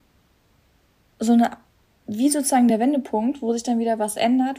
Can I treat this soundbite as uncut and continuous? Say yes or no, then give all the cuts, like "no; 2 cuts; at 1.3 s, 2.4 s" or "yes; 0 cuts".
yes; 0 cuts